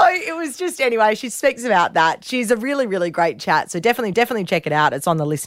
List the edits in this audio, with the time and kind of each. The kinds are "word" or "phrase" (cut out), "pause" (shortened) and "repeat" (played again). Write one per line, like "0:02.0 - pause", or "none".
0:04.1 - repeat